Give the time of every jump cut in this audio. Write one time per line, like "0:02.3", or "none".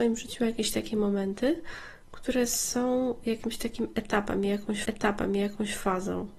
0:04.8